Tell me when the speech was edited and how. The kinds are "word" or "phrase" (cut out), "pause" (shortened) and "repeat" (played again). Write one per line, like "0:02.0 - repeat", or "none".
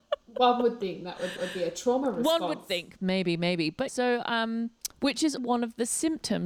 0:01.4 - repeat
0:03.0 - phrase
0:03.9 - word
0:04.9 - pause
0:05.4 - word